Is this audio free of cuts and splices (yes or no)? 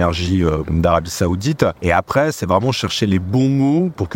no